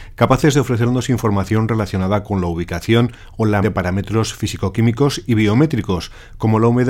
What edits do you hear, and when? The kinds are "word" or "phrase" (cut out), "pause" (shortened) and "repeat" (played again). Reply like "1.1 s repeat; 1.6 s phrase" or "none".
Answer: 3.6 s word